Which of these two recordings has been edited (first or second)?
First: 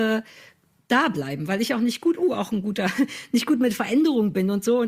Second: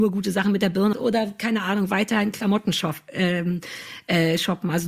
second